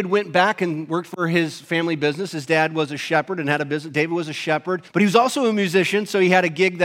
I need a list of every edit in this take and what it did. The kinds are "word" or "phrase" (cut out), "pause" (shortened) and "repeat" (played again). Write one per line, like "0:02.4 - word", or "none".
0:04.9 - pause